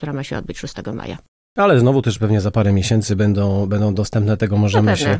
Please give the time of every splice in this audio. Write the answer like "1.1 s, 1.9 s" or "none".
none

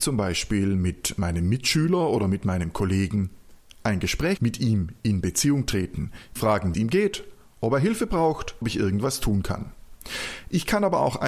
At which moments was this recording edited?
4.4 s, 6.4 s, 6.7 s, 8.6 s

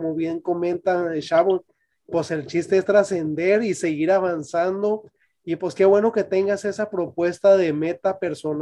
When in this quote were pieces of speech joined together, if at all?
none

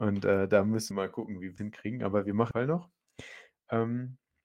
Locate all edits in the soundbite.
0.9 s, 1.6 s, 2.5 s

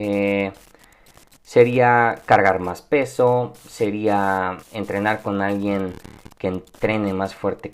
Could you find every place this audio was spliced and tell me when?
4.6 s

